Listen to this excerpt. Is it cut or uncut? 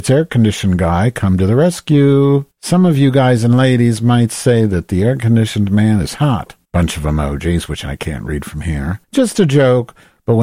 cut